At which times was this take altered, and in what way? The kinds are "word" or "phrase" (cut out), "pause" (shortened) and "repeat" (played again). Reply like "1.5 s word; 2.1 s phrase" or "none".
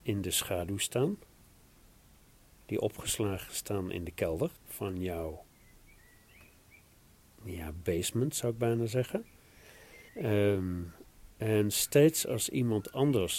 4.6 s pause; 10.1 s pause

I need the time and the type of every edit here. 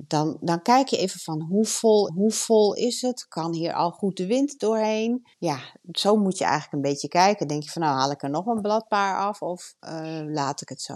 2.1 s repeat; 5.3 s pause; 9.8 s pause

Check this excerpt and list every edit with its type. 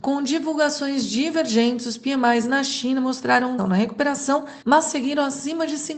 3.6 s word; 4.6 s pause

